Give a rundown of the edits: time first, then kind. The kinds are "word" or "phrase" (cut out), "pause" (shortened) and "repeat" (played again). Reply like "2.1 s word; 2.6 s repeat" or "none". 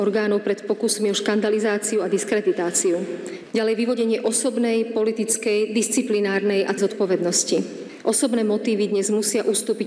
6.8 s word